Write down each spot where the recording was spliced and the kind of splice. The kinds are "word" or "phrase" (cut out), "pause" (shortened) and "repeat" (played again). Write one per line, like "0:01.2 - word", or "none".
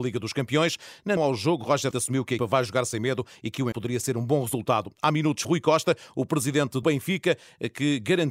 0:01.2 - word
0:01.9 - word
0:02.4 - word
0:03.7 - word
0:05.4 - word
0:06.8 - word